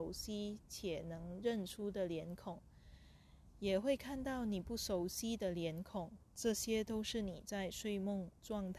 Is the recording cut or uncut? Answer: cut